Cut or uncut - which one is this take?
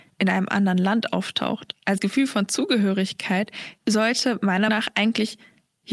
cut